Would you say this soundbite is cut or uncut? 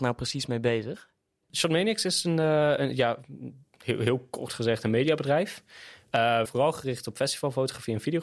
cut